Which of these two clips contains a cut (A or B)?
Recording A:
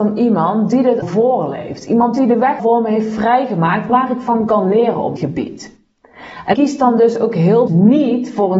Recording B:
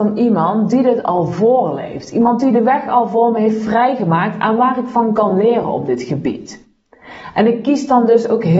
A